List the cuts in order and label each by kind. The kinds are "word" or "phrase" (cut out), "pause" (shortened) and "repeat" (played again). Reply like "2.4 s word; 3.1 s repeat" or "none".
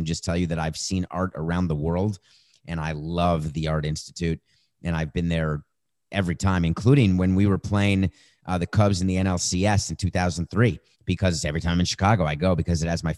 10.9 s pause